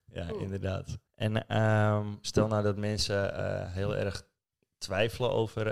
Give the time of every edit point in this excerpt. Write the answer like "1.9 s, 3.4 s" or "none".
1.1 s